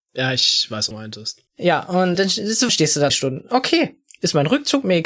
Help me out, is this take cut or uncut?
cut